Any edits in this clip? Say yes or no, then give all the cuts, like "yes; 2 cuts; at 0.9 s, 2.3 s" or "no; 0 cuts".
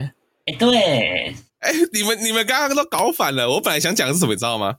yes; 1 cut; at 1.5 s